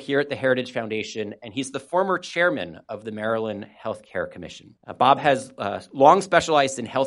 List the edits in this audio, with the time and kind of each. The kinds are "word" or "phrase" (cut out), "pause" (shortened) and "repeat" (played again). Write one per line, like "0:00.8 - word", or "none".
0:04.8 - pause